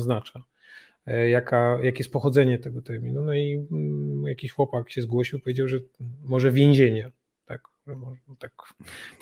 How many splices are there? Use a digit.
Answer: 0